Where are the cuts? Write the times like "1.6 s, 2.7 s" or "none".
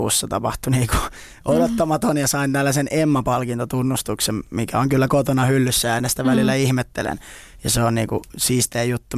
none